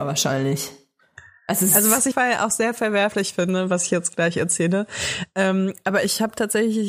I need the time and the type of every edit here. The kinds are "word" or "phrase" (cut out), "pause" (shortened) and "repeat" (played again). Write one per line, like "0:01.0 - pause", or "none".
0:02.1 - phrase